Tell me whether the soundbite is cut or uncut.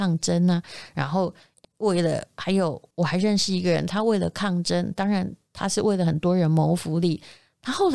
cut